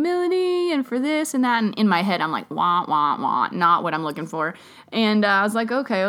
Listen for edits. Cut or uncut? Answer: uncut